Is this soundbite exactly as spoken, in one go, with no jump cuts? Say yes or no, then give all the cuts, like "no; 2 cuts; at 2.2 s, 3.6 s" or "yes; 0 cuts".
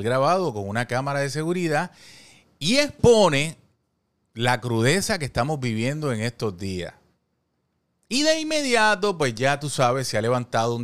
yes; 0 cuts